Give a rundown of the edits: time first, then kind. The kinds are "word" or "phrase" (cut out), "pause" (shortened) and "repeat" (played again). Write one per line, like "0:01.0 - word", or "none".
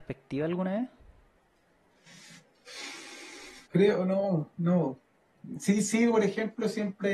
0:03.7 - pause